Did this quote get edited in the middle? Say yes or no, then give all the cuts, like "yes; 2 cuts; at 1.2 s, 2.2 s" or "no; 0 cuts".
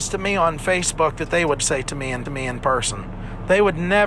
yes; 2 cuts; at 1.6 s, 2.3 s